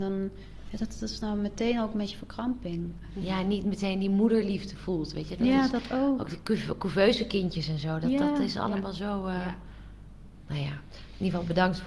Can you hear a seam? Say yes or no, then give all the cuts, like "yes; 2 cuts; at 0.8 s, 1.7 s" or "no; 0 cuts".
no; 0 cuts